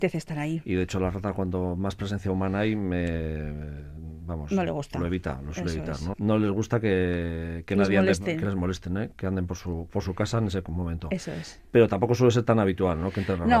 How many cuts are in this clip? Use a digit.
0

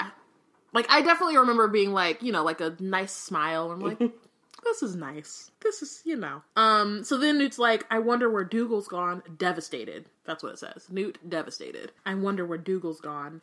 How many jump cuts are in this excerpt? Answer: 4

